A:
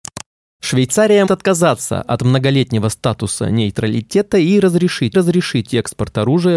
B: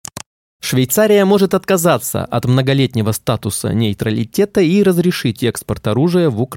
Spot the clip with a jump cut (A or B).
A